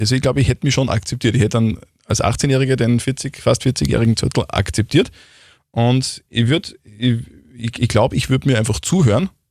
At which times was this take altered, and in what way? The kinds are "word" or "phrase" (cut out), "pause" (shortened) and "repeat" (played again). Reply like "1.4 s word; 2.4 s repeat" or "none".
none